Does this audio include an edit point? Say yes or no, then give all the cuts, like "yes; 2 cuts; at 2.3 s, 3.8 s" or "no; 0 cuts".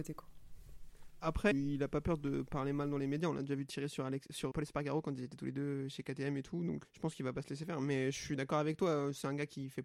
yes; 3 cuts; at 1.5 s, 4.5 s, 6.8 s